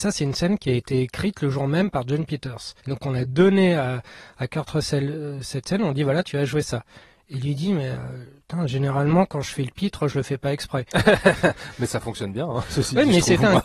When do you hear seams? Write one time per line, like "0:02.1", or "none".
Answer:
0:02.8
0:10.9